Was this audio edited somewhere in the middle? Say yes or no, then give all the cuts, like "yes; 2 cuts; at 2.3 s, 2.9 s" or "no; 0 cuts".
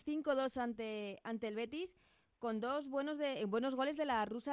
no; 0 cuts